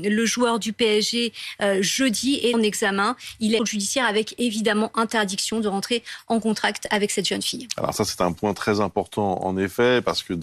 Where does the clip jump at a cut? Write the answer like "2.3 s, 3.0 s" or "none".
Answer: 2.5 s, 3.6 s